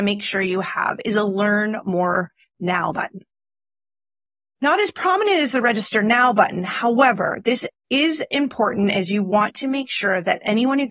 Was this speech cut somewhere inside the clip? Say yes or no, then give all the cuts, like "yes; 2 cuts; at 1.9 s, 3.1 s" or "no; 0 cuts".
no; 0 cuts